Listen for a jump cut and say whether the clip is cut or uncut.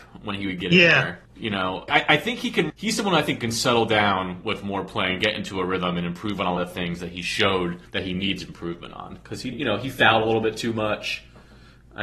cut